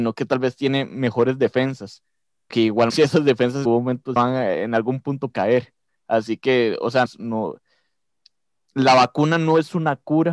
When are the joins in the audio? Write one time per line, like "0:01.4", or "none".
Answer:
0:02.5
0:02.9
0:03.6
0:04.2
0:05.3
0:07.1